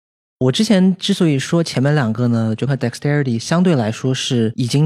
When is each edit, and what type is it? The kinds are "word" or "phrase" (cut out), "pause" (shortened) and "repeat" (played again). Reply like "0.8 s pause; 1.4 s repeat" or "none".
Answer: 2.7 s word